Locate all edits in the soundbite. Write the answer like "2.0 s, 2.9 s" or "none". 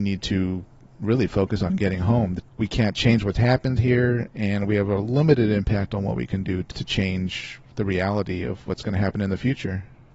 2.5 s